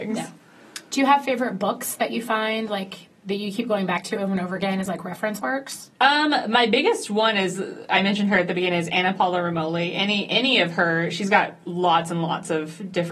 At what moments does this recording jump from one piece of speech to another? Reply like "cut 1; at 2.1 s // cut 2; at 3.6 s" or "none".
none

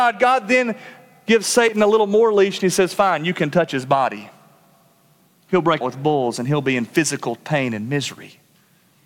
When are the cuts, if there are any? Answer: cut 1; at 5.8 s

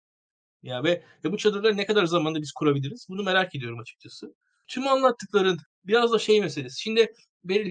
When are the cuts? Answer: none

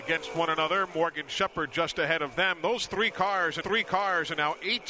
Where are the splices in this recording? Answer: cut 1; at 3.6 s

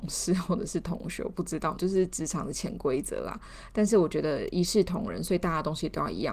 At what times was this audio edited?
cut 1; at 1.8 s

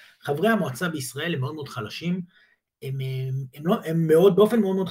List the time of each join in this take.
none

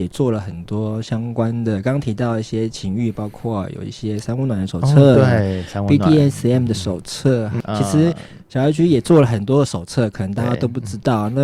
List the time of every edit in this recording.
none

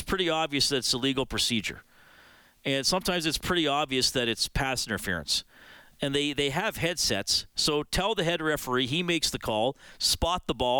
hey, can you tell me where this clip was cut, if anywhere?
none

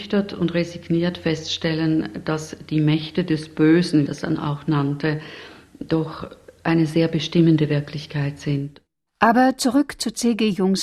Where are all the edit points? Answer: cut 1; at 4.1 s

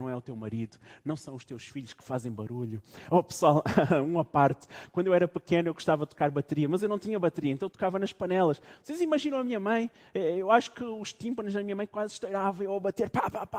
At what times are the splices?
none

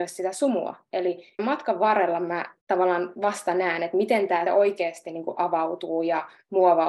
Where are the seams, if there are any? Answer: cut 1; at 1.4 s // cut 2; at 2.6 s // cut 3; at 4.5 s

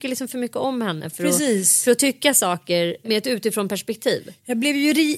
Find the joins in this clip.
none

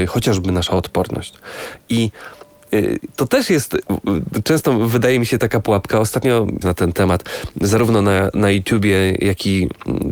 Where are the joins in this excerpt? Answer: cut 1; at 6.6 s

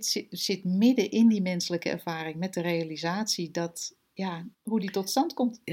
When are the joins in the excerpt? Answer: cut 1; at 4.5 s

